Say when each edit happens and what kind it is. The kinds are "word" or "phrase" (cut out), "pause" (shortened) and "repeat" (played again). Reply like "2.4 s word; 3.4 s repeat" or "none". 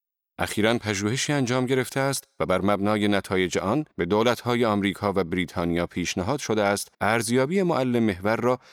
3.9 s pause; 6.9 s pause